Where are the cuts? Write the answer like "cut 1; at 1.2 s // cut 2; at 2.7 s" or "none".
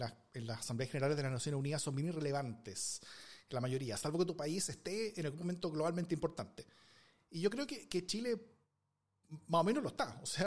none